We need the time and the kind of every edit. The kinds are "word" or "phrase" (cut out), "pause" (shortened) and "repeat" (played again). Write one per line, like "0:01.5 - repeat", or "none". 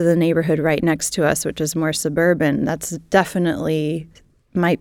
none

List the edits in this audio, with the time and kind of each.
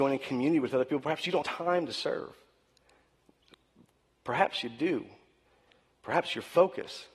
0:01.4 - word

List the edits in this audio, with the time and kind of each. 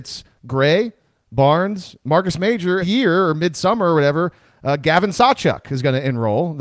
0:02.8 - phrase

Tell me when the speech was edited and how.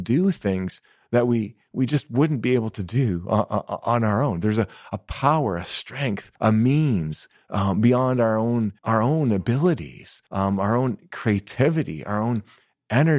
0:06.3 - pause
0:08.8 - pause
0:10.3 - pause

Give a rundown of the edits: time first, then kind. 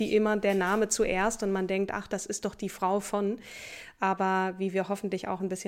none

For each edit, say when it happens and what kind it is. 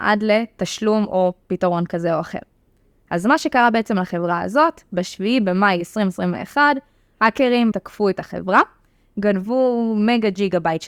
0:07.7 - word

